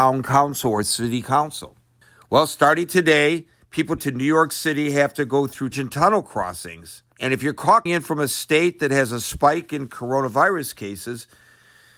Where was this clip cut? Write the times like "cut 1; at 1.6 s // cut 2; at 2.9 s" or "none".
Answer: cut 1; at 2.0 s // cut 2; at 4.0 s // cut 3; at 5.7 s // cut 4; at 7.1 s // cut 5; at 7.9 s